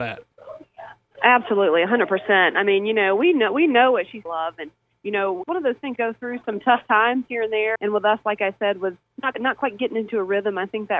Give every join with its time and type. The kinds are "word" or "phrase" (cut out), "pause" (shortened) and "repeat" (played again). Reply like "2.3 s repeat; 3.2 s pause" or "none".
4.3 s word; 5.4 s word; 6.0 s word; 6.4 s word; 7.8 s word; 9.3 s word

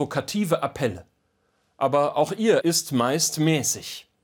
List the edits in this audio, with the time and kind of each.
2.6 s word

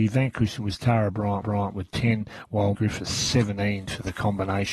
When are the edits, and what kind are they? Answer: 1.4 s repeat; 2.7 s word

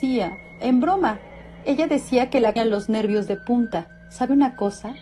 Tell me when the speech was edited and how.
1.6 s word; 2.6 s phrase

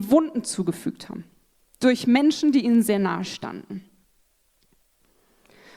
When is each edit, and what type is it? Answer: none

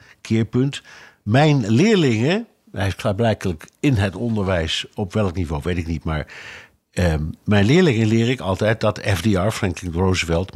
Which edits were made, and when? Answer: none

